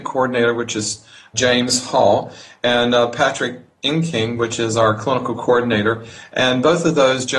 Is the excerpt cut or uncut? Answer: uncut